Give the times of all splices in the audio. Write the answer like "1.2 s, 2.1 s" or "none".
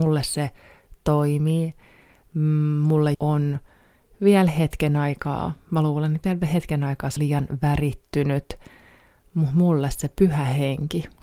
3.1 s, 7.2 s